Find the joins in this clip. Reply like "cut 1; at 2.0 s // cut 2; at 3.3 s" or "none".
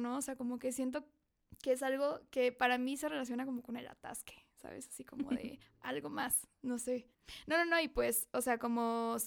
cut 1; at 5.6 s